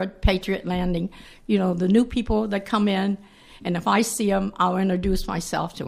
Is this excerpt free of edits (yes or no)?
yes